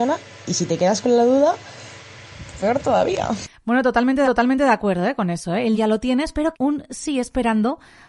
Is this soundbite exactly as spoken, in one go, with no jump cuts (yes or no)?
no